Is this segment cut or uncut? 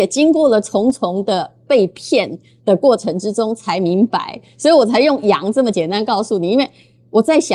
uncut